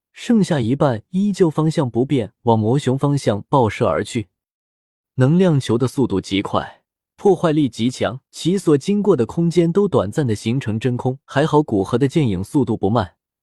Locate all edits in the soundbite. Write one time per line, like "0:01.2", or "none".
0:08.3
0:11.2